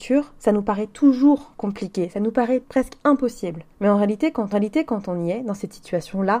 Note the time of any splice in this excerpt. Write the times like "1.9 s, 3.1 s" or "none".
2.6 s, 3.7 s, 4.5 s